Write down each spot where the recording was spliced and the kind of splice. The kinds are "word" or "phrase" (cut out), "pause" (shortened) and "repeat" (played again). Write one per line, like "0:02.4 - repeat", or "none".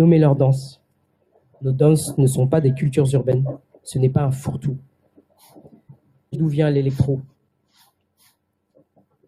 0:03.7 - pause
0:06.3 - phrase

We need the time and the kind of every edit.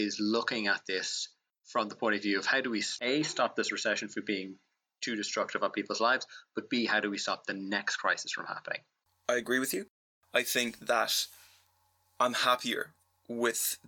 none

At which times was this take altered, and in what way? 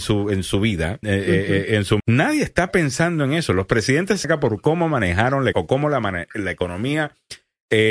0:01.0 - word
0:02.0 - word
0:04.2 - word
0:05.5 - word

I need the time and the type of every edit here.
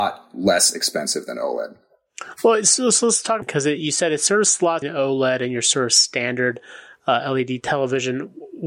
0:03.4 - phrase
0:04.8 - phrase

